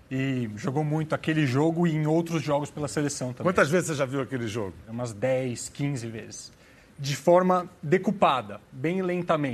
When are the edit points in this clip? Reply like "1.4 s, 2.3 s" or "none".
none